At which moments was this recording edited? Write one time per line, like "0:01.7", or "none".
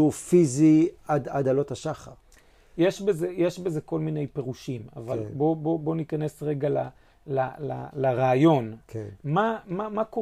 none